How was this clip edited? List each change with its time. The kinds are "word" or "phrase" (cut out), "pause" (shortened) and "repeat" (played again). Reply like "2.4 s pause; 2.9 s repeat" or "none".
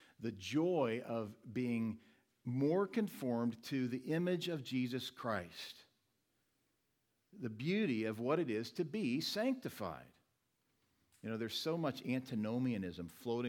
none